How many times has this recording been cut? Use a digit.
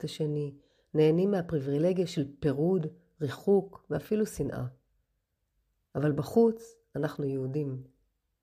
0